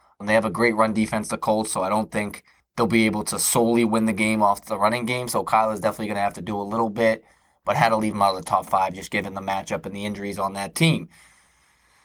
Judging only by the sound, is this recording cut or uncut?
uncut